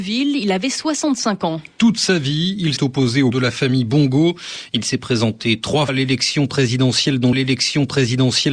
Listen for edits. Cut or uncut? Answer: cut